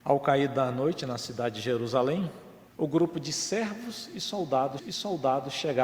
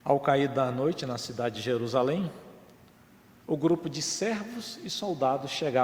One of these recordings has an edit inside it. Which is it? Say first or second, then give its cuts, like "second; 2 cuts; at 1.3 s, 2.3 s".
first; 2 cuts; at 2.7 s, 4.8 s